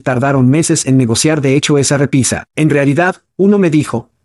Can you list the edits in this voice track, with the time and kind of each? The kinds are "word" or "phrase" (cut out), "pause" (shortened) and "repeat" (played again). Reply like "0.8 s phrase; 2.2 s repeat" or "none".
2.5 s pause